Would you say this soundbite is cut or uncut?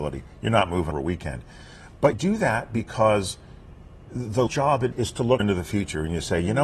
cut